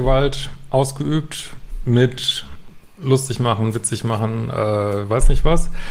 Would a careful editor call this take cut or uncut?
uncut